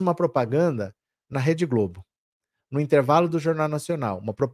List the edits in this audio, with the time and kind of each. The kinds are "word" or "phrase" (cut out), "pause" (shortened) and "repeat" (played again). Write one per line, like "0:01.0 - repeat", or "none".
none